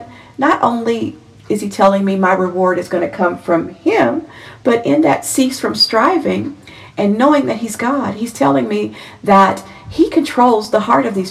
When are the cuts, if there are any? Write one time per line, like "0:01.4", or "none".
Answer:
none